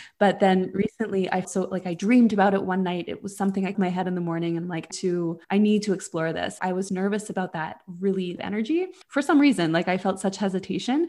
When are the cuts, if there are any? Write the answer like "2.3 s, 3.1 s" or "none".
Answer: 1.4 s, 3.7 s, 4.9 s, 5.4 s, 6.6 s, 6.9 s, 8.4 s, 9.0 s